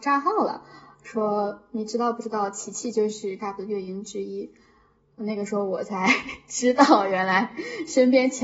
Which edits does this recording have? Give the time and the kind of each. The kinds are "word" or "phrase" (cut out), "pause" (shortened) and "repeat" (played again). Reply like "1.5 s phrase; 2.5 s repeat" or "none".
3.4 s word